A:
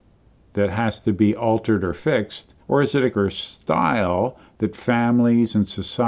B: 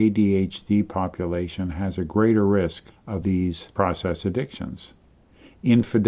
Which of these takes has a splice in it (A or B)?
A